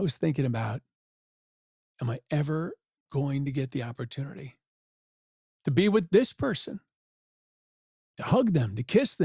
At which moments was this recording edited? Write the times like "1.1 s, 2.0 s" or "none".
none

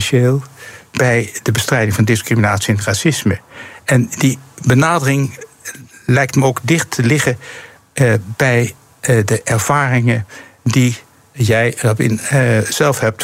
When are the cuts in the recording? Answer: none

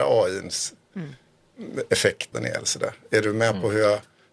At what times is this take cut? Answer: 2.3 s

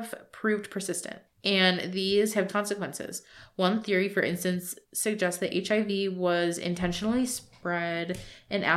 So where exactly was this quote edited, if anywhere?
1.3 s, 2.5 s, 4.8 s

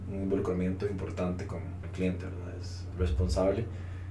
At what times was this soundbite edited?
1.8 s, 2.9 s

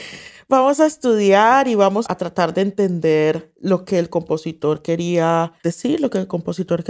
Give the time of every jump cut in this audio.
2.1 s, 3.6 s, 5.6 s

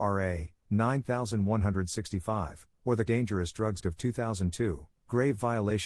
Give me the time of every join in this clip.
3.1 s, 3.8 s

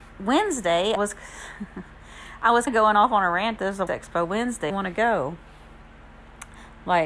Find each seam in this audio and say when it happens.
1.0 s, 2.7 s, 3.6 s, 3.9 s, 4.7 s

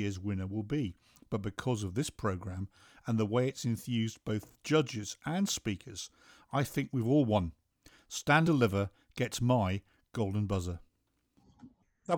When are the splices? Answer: 8.4 s

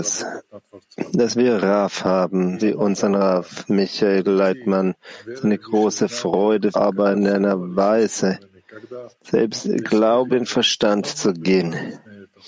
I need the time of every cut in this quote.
2.6 s, 6.7 s, 9.1 s, 10.3 s

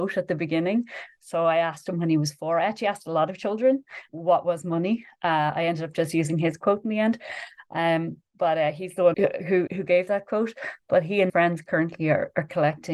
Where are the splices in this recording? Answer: 4.1 s, 9.1 s, 9.7 s, 11.3 s

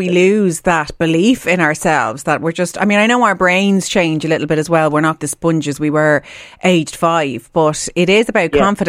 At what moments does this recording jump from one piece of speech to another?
5.2 s

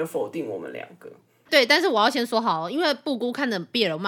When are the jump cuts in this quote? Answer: none

